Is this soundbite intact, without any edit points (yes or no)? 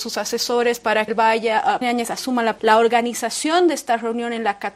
no